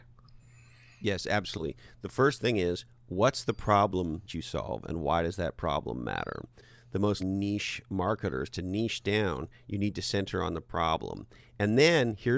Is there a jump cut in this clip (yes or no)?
yes